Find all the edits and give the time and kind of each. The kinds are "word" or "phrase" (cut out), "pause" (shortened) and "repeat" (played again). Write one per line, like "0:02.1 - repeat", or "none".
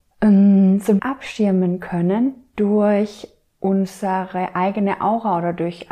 0:01.0 - word